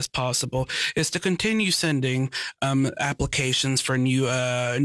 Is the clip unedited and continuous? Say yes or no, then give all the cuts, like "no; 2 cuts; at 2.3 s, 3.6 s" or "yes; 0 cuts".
yes; 0 cuts